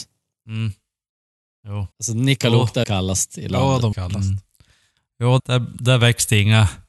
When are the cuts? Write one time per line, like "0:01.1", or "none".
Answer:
0:01.9
0:02.8
0:03.9
0:05.4